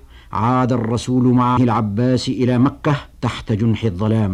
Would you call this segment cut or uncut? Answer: cut